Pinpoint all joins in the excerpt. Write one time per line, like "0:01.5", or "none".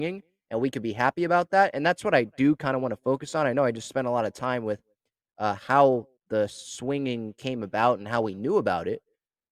0:06.2